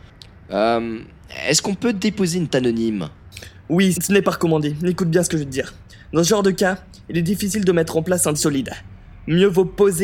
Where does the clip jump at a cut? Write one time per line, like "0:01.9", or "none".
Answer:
0:02.5
0:03.9
0:08.3